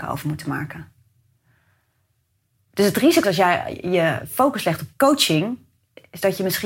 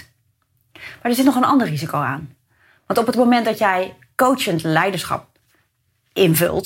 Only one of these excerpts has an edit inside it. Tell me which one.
first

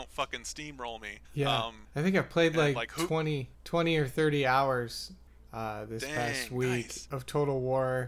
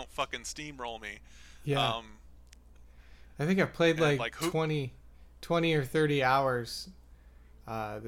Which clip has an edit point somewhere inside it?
first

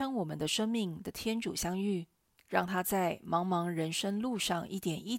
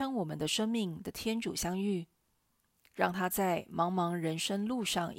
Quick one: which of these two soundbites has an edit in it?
first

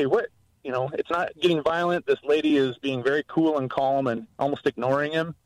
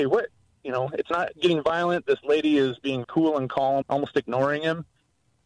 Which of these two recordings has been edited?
second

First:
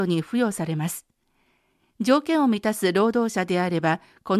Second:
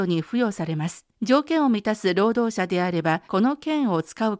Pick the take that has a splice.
second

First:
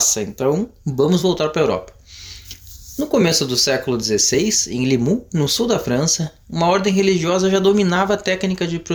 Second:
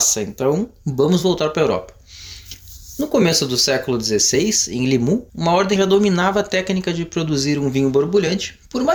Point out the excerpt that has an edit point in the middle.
second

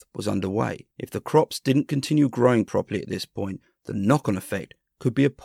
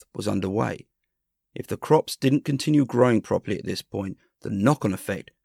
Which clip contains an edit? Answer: first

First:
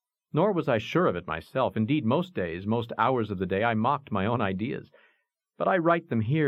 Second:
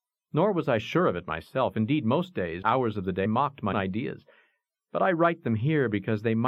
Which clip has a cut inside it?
second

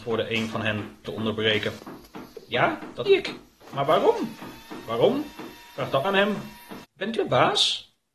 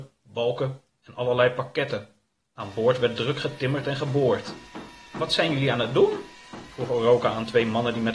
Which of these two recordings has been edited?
first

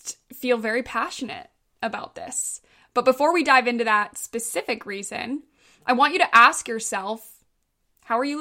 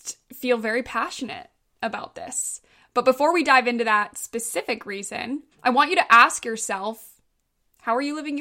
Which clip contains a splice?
second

